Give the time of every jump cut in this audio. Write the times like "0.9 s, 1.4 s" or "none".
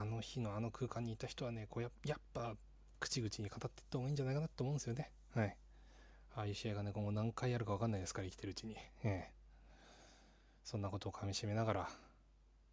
none